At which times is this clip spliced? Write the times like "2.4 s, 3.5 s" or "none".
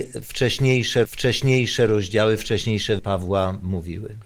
1.0 s, 3.0 s